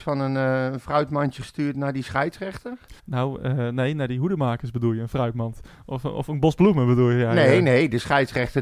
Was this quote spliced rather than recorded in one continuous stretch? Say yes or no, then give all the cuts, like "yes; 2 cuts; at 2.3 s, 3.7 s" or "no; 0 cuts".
yes; 1 cut; at 3.0 s